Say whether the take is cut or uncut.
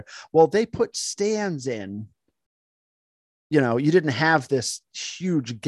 uncut